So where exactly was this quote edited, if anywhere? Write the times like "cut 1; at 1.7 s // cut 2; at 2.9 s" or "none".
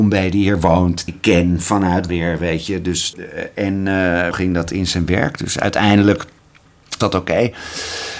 cut 1; at 1.1 s // cut 2; at 2.1 s // cut 3; at 3.1 s // cut 4; at 4.3 s // cut 5; at 7.0 s